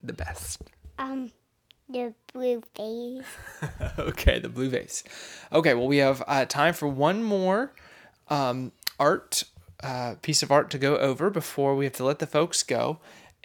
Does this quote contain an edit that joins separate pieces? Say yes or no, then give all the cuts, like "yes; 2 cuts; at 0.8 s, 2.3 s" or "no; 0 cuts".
no; 0 cuts